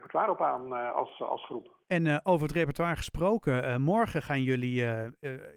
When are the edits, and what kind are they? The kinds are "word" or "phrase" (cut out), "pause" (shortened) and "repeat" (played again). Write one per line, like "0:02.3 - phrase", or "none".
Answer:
0:01.8 - pause